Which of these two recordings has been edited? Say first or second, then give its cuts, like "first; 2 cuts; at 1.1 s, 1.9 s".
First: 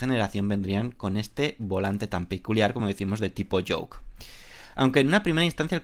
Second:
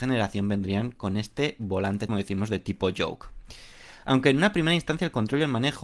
second; 1 cut; at 2.1 s